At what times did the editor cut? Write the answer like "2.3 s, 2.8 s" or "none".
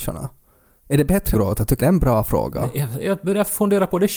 1.3 s, 1.8 s